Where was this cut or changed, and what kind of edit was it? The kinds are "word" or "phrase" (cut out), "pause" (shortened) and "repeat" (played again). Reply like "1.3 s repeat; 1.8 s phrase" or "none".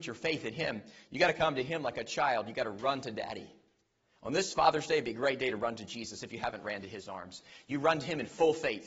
none